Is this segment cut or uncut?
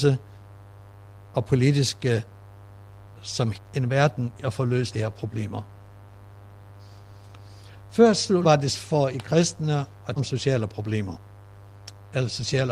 cut